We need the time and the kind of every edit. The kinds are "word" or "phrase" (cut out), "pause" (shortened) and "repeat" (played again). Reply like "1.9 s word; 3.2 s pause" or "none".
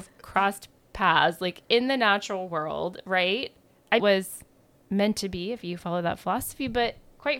4.0 s phrase